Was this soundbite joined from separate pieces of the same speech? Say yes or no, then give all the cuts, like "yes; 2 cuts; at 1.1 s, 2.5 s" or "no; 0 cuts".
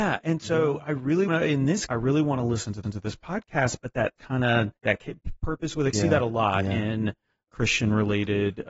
yes; 7 cuts; at 1.3 s, 1.9 s, 2.8 s, 4.2 s, 4.8 s, 5.9 s, 7.5 s